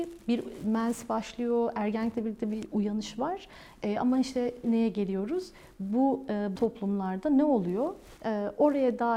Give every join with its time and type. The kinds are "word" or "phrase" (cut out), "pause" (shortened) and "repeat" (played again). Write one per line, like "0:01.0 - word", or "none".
0:04.6 - word
0:06.6 - word